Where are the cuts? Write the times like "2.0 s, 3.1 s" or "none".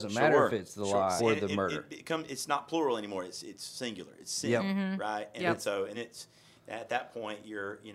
1.2 s, 5.9 s